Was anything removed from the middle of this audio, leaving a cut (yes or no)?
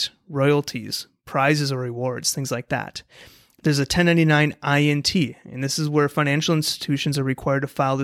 no